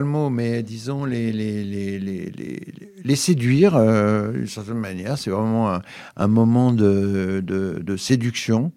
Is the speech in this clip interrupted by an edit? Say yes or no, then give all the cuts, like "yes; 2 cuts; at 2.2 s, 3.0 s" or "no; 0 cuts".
no; 0 cuts